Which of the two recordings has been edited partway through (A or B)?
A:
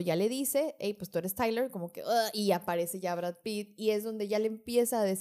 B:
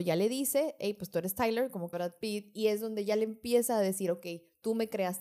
B